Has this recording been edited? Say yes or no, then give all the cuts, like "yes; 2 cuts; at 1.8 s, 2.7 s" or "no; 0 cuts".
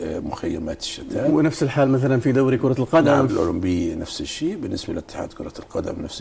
yes; 1 cut; at 3.3 s